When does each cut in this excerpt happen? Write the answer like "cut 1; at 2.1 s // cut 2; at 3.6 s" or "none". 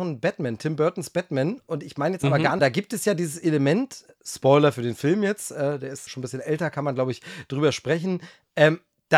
cut 1; at 2.6 s // cut 2; at 6.1 s